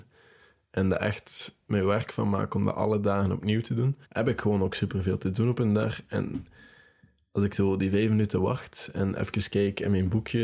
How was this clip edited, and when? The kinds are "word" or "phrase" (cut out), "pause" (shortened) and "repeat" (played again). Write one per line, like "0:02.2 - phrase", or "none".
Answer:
0:04.0 - pause